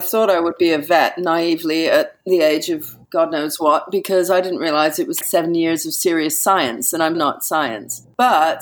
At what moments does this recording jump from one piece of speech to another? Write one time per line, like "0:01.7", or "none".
0:05.2
0:07.1